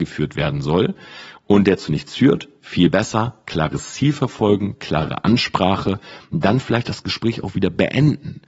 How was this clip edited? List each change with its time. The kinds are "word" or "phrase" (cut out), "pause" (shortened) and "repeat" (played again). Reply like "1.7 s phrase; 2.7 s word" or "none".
none